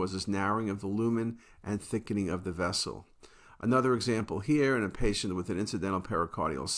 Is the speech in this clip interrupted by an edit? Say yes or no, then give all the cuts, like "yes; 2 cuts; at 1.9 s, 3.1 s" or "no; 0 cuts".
no; 0 cuts